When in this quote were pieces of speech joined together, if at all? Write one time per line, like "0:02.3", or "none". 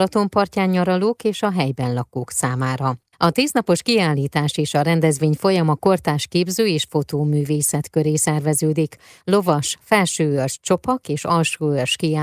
0:03.1